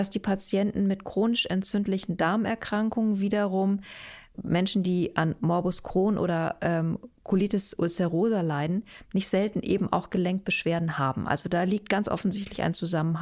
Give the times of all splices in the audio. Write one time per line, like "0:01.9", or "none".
0:04.3